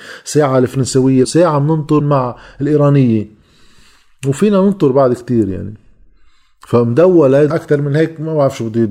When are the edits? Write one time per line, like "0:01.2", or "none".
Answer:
0:01.2
0:02.0
0:07.5

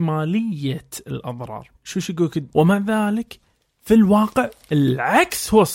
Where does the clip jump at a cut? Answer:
0:01.8
0:02.5

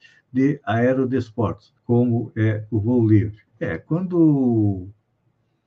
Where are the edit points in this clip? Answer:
0:01.8
0:03.5

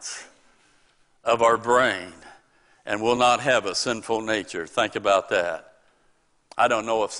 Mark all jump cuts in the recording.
none

